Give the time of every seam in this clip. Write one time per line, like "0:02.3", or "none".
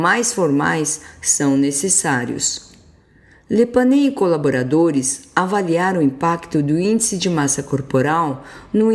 none

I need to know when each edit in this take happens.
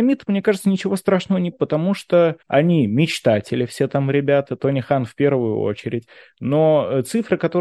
0:01.5
0:02.4

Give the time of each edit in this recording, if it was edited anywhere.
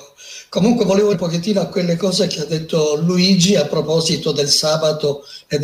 0:01.1

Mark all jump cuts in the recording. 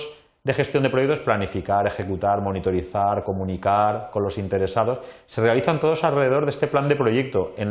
none

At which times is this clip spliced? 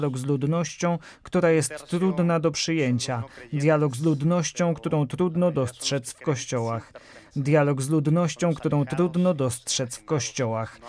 none

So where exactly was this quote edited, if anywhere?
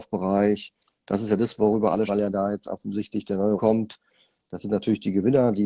0:02.1
0:03.6

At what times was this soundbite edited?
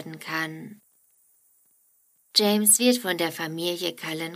none

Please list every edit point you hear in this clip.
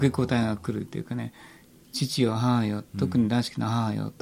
none

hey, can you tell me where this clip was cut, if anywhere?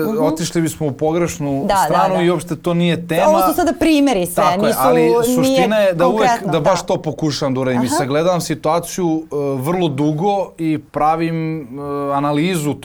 0:10.9

